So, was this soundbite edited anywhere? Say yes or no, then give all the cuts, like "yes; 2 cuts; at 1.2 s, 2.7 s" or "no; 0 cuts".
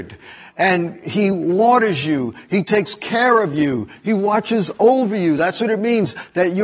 no; 0 cuts